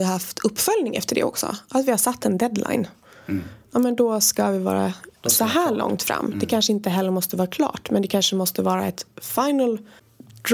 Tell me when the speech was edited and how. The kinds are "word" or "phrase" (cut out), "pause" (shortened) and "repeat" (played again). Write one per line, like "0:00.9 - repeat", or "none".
0:03.6 - pause

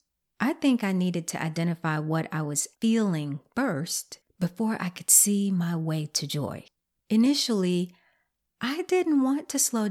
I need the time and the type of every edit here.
0:02.8 - word
0:04.3 - pause
0:06.8 - pause

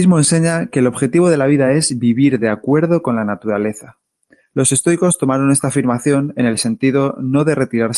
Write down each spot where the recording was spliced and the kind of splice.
none

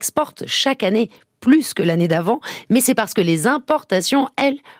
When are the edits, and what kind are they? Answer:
none

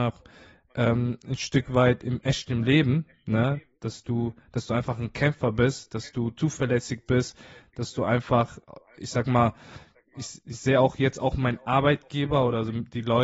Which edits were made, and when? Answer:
none

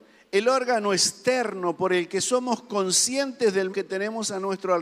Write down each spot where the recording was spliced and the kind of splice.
0:03.7 - word

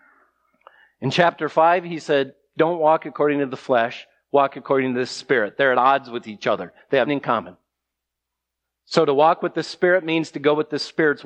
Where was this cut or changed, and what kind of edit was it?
0:07.1 - word

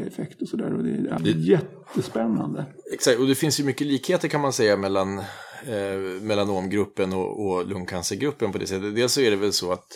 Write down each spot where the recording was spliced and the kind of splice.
0:01.2 - word

